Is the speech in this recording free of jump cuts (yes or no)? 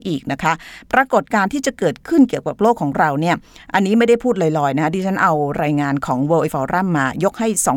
no